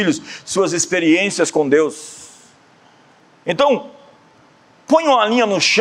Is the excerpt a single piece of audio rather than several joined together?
yes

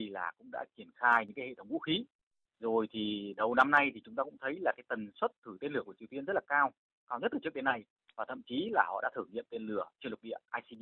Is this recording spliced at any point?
no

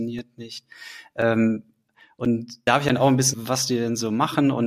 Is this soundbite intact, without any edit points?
no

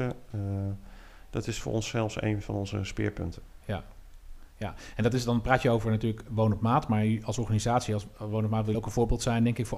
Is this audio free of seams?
no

